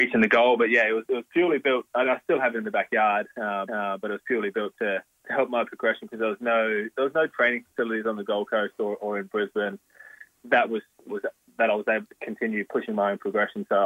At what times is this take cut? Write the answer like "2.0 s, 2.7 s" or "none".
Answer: 3.7 s, 11.1 s